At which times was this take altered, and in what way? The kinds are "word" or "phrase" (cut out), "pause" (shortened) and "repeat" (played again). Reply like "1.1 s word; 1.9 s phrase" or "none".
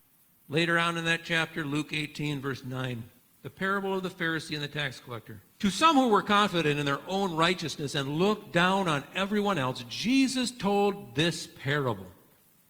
3.2 s pause; 5.5 s pause